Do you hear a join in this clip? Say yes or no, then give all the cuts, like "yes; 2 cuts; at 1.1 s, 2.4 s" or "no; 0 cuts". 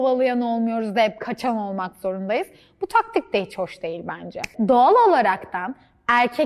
no; 0 cuts